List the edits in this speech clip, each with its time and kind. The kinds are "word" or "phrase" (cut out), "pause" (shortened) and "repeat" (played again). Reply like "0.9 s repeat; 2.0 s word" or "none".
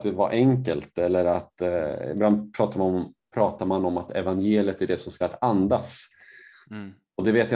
5.2 s phrase